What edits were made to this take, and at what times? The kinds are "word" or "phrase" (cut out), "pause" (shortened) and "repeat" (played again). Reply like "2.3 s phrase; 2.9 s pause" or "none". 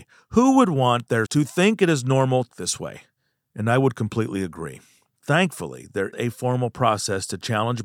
1.3 s word; 2.5 s word; 6.1 s word